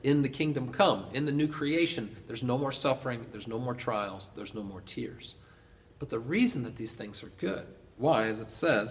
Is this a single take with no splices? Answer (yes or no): yes